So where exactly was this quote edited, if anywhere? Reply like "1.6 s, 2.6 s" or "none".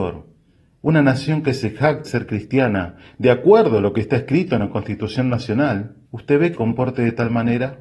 2.1 s, 6.0 s, 6.5 s